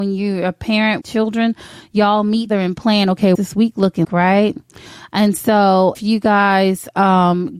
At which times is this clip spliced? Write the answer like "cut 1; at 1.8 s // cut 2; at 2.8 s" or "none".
cut 1; at 1.0 s // cut 2; at 2.5 s // cut 3; at 3.3 s // cut 4; at 4.0 s // cut 5; at 5.9 s